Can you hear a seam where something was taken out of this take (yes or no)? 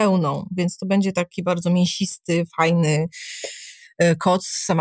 no